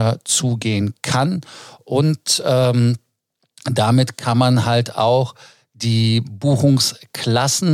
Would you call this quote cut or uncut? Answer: uncut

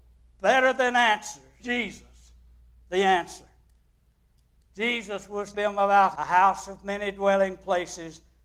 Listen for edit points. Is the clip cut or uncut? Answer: cut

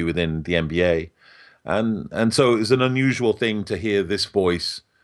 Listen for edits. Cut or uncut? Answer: uncut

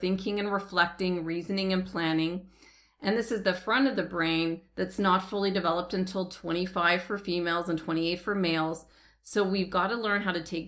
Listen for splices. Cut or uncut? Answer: uncut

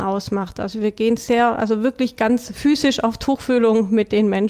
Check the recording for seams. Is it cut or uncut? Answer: uncut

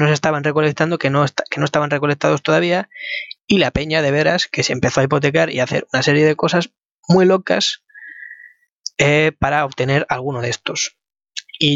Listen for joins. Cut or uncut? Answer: uncut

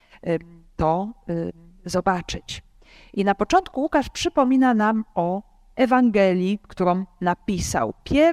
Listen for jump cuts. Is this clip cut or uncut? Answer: uncut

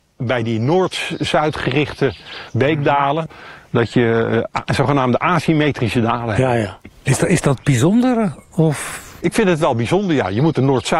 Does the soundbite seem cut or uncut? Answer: cut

